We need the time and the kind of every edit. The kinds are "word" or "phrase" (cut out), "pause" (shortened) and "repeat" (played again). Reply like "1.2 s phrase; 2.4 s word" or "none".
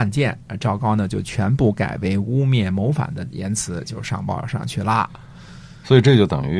none